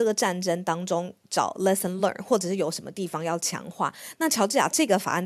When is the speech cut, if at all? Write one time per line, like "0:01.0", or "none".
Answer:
none